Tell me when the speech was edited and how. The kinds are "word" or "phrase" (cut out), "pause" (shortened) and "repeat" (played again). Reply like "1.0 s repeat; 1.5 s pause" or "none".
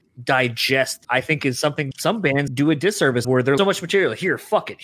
1.0 s word; 1.9 s word; 2.5 s word; 3.2 s word; 3.6 s phrase